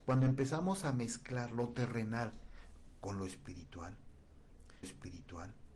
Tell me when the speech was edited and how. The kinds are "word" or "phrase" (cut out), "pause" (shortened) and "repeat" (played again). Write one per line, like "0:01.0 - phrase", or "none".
0:04.8 - repeat